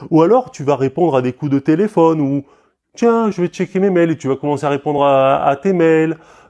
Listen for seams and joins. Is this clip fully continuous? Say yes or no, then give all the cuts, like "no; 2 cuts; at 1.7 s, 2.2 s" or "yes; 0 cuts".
yes; 0 cuts